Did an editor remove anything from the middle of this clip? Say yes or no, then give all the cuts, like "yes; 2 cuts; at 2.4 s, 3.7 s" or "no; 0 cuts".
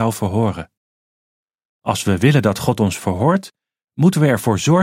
no; 0 cuts